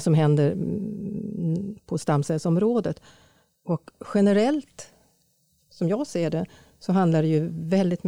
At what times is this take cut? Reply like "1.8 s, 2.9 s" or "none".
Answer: none